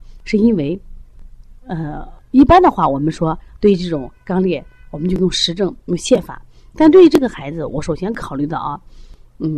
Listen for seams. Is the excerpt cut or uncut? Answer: uncut